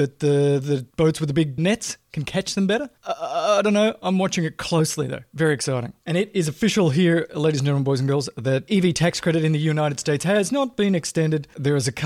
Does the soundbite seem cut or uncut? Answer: cut